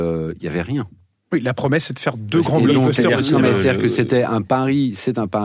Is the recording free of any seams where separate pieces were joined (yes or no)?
yes